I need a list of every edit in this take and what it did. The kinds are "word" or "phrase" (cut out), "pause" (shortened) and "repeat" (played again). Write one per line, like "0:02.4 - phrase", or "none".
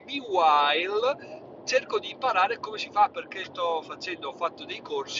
0:03.4 - word